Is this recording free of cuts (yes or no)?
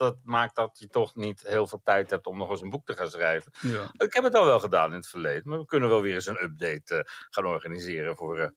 yes